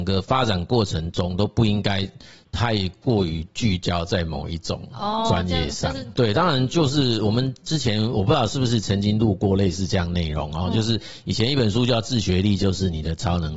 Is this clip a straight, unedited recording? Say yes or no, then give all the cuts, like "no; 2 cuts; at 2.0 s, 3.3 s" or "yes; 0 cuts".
yes; 0 cuts